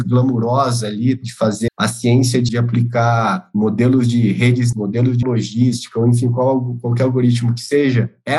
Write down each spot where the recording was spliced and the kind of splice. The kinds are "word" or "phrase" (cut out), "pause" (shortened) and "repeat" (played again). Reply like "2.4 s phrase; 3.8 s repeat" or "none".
1.7 s word; 2.5 s word; 4.7 s word; 5.2 s word